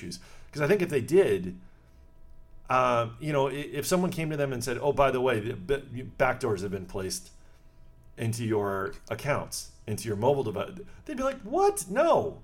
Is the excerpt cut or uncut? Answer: uncut